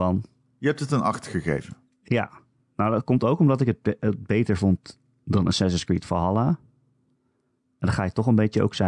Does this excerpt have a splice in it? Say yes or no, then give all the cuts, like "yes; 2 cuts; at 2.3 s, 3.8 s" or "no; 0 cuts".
no; 0 cuts